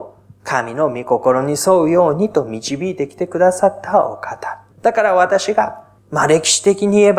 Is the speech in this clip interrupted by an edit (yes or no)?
yes